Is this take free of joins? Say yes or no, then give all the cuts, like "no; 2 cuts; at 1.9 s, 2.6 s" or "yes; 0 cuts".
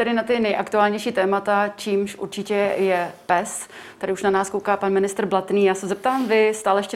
yes; 0 cuts